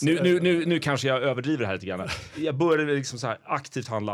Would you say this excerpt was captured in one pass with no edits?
yes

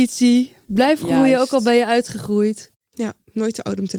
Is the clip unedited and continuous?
yes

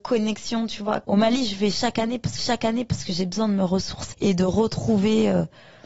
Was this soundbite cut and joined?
yes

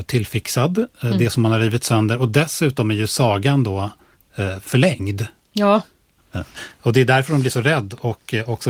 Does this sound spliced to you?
no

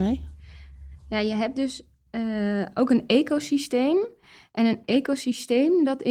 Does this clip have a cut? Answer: no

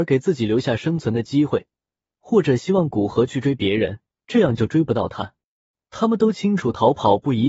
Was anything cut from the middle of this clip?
yes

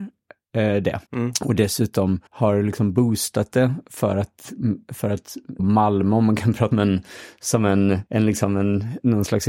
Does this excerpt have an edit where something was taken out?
yes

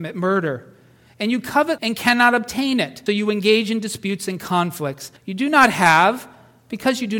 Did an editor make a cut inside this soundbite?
yes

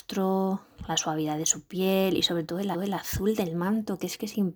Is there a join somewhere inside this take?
yes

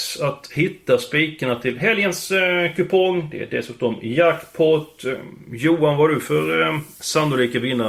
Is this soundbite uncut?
yes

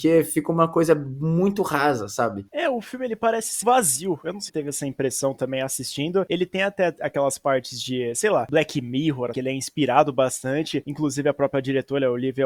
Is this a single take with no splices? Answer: no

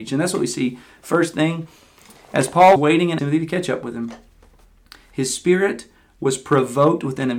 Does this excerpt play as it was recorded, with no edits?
no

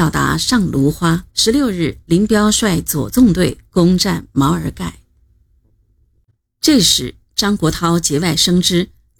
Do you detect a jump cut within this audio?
yes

